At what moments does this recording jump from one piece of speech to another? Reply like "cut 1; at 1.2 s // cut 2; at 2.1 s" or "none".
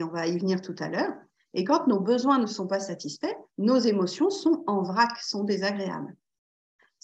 none

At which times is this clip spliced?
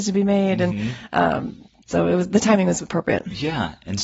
none

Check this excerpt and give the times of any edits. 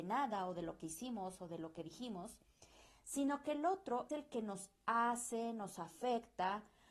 cut 1; at 4.1 s

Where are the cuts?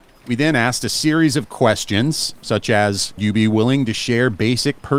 cut 1; at 3.2 s

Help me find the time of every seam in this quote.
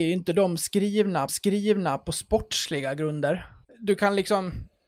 cut 1; at 1.3 s // cut 2; at 3.6 s

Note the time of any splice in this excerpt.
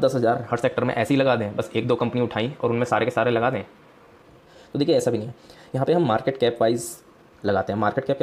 none

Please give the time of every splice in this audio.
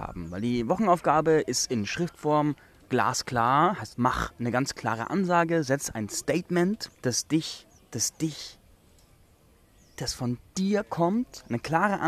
cut 1; at 3.9 s // cut 2; at 7.0 s // cut 3; at 7.8 s

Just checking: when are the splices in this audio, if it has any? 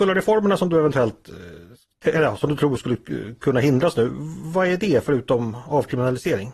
none

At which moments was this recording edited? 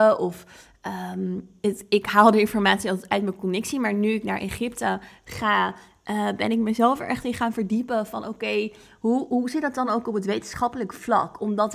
none

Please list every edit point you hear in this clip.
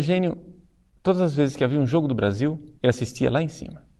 cut 1; at 2.8 s

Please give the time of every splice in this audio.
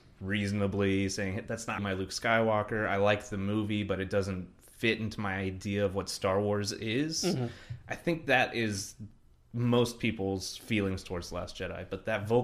cut 1; at 1.8 s

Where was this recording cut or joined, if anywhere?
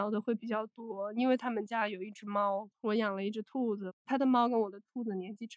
cut 1; at 2.7 s

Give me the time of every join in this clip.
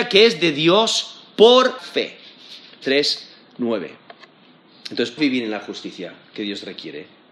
cut 1; at 1.8 s // cut 2; at 2.8 s // cut 3; at 5.2 s

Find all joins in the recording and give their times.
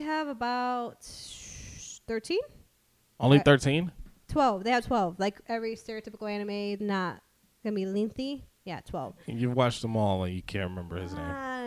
cut 1; at 6.8 s

